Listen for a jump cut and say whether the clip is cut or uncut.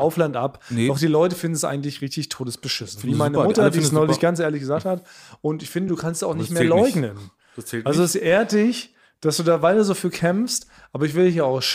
uncut